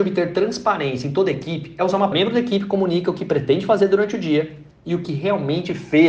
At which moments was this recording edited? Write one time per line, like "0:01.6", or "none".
0:02.1